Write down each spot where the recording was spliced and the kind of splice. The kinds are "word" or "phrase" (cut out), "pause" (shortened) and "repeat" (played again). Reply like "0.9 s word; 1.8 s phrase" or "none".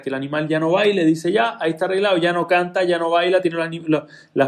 none